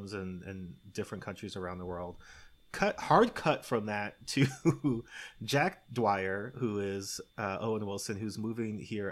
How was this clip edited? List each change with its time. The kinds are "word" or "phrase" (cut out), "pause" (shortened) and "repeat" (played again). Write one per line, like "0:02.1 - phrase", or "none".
0:07.3 - pause